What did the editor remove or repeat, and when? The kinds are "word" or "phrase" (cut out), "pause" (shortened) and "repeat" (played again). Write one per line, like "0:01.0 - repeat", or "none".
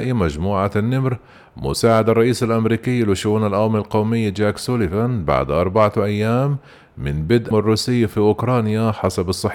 0:07.5 - word